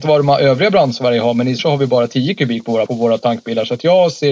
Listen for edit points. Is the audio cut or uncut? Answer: cut